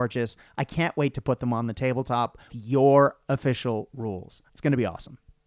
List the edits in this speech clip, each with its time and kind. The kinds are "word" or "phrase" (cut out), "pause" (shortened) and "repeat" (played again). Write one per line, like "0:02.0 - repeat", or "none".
0:02.5 - word
0:04.5 - pause